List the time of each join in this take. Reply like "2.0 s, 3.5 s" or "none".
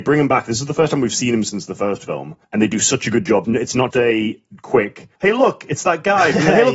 2.4 s, 3.4 s, 3.9 s, 5.2 s